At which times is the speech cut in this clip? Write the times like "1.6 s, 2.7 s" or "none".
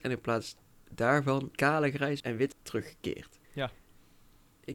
1.5 s, 2.2 s, 2.5 s, 3.4 s